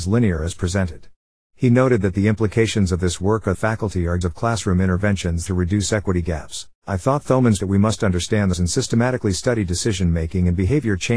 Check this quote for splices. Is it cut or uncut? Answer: cut